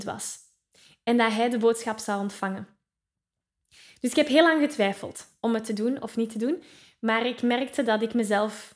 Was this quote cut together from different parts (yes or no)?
no